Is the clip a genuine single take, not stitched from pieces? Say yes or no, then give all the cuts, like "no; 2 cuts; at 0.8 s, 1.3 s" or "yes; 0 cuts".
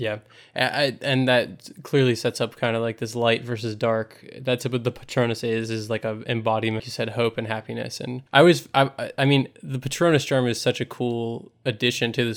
no; 3 cuts; at 6.8 s, 8.3 s, 9.6 s